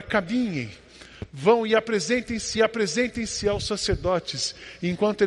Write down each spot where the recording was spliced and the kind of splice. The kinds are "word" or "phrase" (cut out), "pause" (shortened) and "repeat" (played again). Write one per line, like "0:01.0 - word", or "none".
0:02.5 - repeat